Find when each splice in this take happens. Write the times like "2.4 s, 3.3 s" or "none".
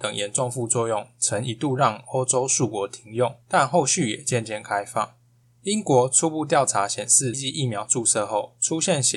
3.4 s, 7.3 s